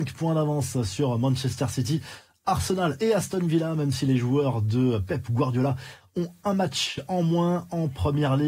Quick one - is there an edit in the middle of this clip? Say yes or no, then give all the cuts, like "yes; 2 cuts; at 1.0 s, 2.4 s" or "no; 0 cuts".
no; 0 cuts